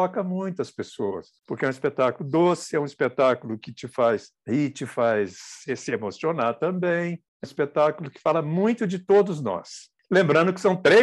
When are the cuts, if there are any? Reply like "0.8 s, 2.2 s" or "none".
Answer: 7.4 s